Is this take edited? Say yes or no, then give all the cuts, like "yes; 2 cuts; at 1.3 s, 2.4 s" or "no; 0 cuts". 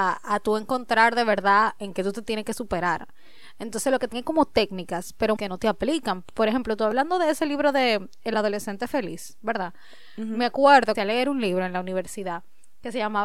yes; 3 cuts; at 4.1 s, 5.4 s, 10.9 s